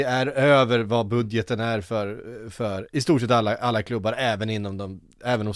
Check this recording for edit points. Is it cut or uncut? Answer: uncut